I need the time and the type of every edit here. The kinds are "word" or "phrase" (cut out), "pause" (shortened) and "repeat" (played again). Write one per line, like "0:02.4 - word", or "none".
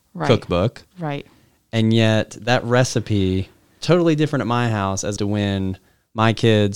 0:03.8 - word
0:05.2 - word